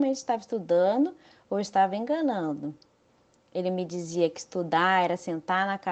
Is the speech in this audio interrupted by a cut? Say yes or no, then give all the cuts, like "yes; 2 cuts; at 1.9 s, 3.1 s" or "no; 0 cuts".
no; 0 cuts